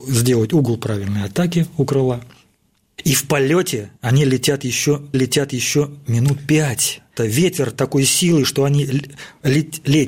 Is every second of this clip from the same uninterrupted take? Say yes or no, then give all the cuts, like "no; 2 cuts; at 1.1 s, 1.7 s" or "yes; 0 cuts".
no; 3 cuts; at 4.0 s, 5.1 s, 7.2 s